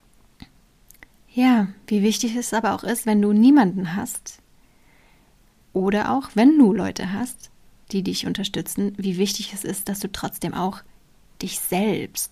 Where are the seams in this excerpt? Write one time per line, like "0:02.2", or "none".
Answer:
none